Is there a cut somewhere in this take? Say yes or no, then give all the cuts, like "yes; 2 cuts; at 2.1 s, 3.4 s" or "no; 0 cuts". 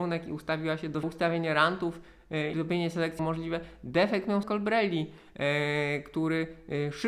yes; 4 cuts; at 1.0 s, 2.5 s, 3.2 s, 4.4 s